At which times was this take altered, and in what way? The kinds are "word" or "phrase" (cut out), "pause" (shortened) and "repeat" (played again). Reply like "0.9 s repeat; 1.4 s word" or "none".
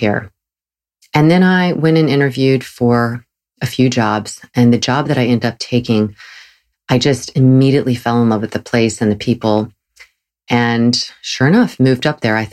none